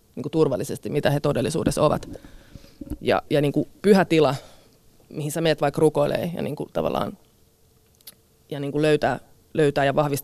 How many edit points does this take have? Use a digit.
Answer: 0